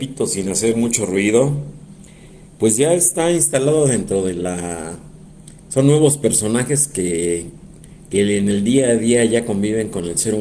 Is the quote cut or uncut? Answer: cut